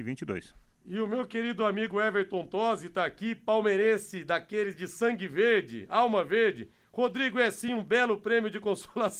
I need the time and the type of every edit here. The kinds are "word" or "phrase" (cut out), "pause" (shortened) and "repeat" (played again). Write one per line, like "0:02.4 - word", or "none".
none